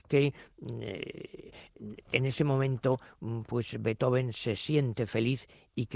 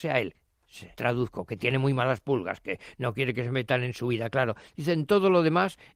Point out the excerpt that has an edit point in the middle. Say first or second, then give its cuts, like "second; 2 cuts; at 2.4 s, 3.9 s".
second; 1 cut; at 0.9 s